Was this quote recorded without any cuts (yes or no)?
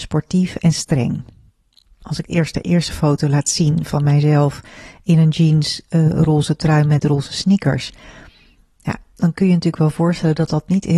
yes